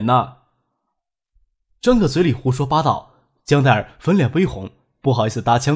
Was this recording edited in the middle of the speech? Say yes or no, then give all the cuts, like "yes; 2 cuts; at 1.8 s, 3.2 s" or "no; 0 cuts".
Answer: no; 0 cuts